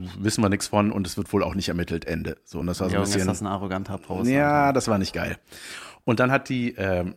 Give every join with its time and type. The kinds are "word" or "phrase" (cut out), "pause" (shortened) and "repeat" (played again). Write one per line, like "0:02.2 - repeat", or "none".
none